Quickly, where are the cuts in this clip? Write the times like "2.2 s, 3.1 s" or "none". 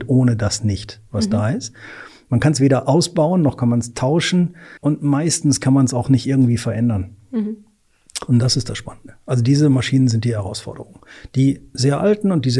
4.8 s